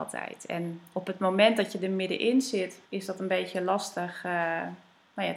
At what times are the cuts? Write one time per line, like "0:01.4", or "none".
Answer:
0:02.9